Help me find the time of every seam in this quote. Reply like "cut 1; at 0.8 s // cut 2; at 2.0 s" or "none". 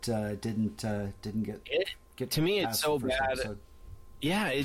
none